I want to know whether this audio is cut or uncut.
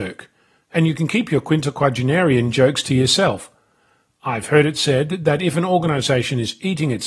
uncut